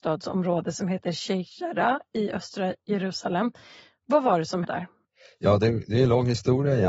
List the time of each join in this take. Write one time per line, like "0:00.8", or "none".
0:04.6